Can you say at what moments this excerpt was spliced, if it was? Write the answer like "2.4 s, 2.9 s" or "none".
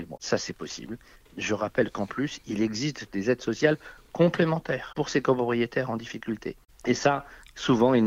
none